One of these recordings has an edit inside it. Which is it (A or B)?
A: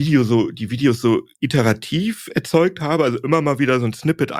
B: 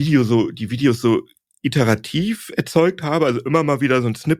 A